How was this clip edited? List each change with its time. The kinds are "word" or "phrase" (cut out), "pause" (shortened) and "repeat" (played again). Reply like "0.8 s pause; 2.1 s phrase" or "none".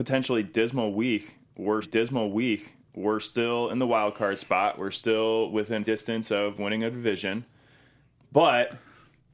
1.8 s repeat; 5.8 s word